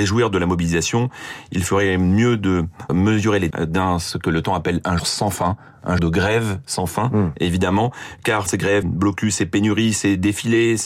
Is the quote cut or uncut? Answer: cut